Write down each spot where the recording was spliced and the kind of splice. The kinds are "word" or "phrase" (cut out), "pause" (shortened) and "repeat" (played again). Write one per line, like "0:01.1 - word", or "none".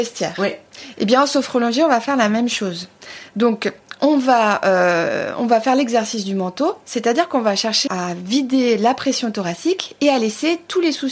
0:07.9 - word